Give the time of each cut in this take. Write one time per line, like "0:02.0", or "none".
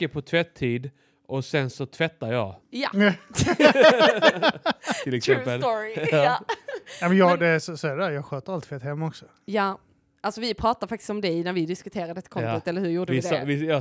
none